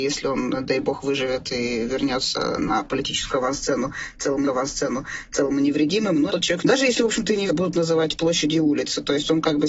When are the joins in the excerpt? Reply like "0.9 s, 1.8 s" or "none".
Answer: 4.5 s, 6.3 s, 6.6 s, 7.5 s